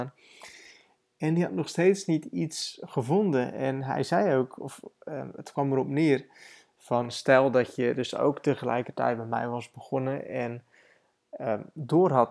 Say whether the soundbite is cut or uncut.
uncut